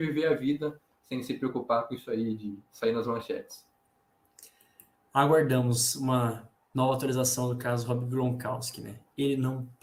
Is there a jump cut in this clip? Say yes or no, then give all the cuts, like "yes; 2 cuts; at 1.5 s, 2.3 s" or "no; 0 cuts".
no; 0 cuts